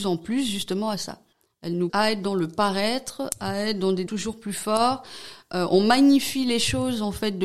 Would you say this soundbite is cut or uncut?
cut